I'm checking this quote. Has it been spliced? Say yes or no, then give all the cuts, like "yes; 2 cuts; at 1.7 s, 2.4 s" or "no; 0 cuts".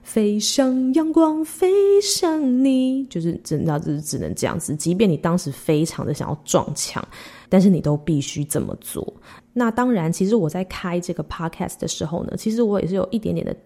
yes; 1 cut; at 7.5 s